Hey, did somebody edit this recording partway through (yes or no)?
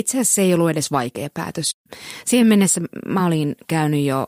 no